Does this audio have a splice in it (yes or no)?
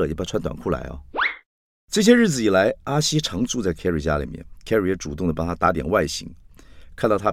no